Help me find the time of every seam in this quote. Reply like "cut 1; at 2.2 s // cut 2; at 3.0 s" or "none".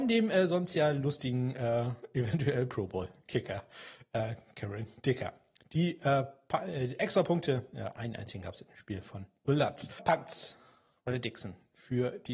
none